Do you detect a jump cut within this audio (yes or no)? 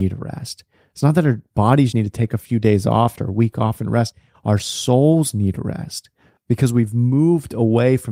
yes